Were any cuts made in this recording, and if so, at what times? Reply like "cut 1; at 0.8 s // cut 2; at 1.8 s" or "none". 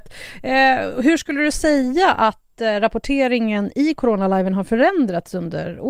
none